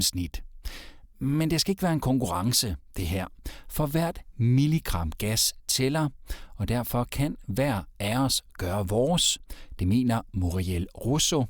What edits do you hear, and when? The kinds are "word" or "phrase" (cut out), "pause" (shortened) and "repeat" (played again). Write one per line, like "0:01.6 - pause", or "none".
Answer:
none

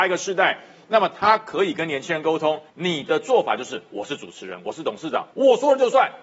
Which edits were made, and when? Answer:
0:02.7 - pause
0:05.3 - pause

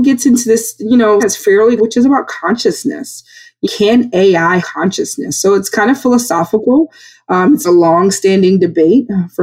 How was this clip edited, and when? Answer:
0:01.2 - word
0:01.8 - word
0:03.6 - word
0:04.6 - word
0:07.6 - word

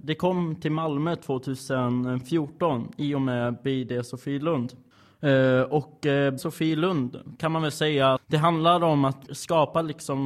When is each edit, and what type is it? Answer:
0:06.4 - word
0:08.2 - word
0:09.3 - word

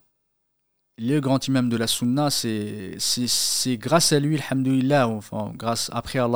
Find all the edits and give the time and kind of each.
none

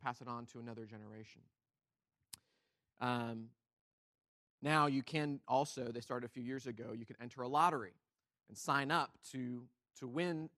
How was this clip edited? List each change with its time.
none

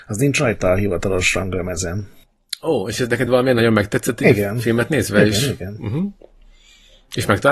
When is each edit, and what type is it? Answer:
none

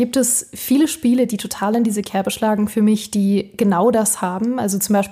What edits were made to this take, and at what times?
none

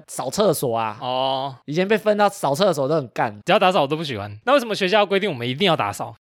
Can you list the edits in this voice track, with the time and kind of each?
0:03.4 - phrase

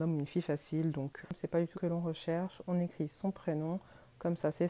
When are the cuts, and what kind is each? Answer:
0:01.2 - word
0:01.7 - word

